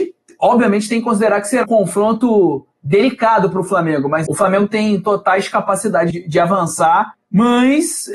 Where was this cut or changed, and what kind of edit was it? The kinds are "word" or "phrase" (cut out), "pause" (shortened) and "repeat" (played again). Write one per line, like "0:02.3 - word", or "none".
0:01.6 - word
0:04.3 - phrase
0:06.1 - word